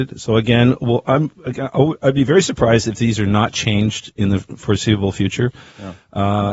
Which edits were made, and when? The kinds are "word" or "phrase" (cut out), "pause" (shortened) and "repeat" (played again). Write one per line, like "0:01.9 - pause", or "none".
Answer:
none